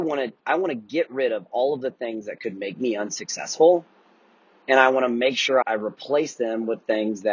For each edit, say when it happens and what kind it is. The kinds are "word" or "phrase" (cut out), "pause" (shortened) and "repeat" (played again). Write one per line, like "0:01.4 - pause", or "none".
0:05.6 - word